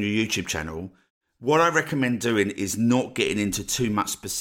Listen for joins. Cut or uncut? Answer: uncut